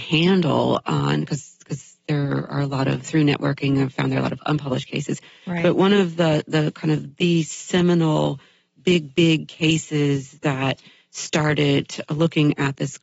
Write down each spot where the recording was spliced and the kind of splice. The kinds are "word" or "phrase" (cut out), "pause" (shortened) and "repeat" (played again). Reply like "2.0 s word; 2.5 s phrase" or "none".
none